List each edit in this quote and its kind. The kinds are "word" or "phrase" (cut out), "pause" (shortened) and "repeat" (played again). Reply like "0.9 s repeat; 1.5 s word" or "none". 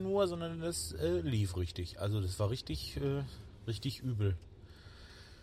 none